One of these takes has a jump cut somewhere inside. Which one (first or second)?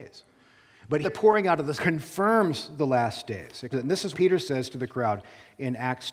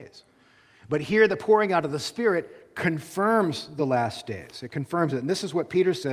first